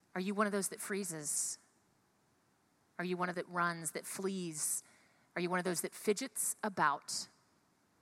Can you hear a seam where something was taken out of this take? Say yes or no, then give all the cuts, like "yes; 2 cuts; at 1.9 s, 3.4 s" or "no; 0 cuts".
yes; 1 cut; at 3.3 s